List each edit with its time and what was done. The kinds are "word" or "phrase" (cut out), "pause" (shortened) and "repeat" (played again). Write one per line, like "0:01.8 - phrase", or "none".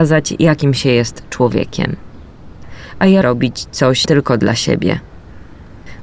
0:03.2 - word
0:04.1 - word